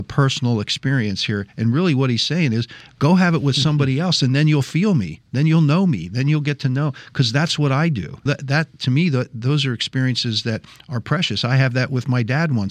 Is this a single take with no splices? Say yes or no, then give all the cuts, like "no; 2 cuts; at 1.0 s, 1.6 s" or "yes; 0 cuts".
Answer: no; 1 cut; at 8.3 s